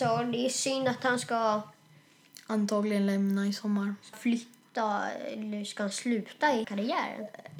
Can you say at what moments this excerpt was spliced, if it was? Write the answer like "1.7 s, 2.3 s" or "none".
4.1 s, 6.6 s